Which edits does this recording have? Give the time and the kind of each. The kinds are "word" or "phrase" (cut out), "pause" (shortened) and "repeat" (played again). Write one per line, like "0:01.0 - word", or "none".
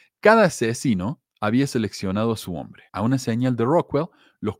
0:01.3 - pause
0:02.9 - pause